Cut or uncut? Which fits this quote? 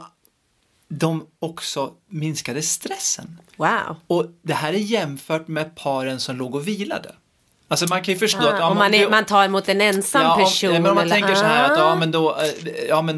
cut